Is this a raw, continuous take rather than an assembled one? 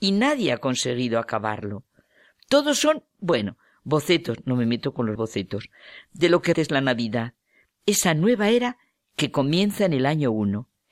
no; 2 cuts; at 5.2 s, 6.5 s

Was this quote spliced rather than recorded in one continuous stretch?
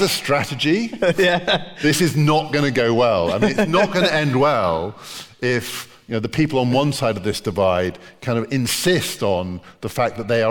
no; 0 cuts

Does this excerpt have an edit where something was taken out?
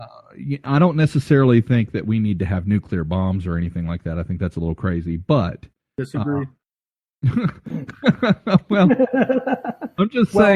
no; 0 cuts

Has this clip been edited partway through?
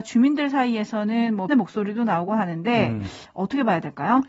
yes; 2 cuts; at 1.5 s, 2.3 s

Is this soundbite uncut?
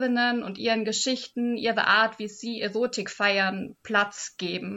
yes; 0 cuts

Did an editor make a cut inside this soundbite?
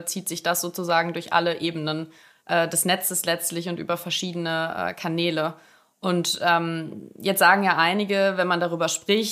no; 0 cuts

